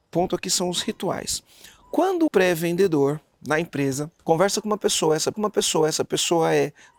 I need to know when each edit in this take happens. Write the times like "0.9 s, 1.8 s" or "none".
2.3 s, 4.2 s, 5.3 s